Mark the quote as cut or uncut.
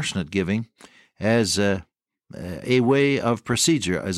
uncut